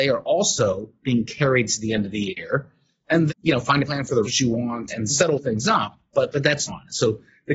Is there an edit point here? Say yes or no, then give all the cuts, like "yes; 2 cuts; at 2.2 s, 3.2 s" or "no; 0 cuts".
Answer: yes; 5 cuts; at 3.3 s, 3.8 s, 4.2 s, 4.9 s, 6.7 s